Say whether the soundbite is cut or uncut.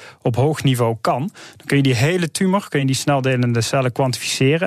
uncut